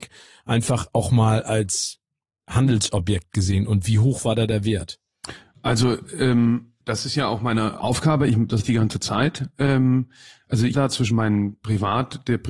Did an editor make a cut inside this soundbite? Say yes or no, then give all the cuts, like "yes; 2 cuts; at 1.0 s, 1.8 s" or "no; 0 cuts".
yes; 3 cuts; at 6.8 s, 8.6 s, 10.7 s